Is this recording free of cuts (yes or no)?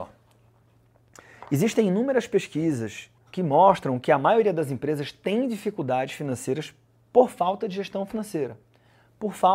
no